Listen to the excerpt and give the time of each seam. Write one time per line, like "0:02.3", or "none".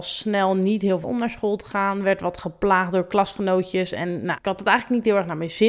0:01.0
0:04.4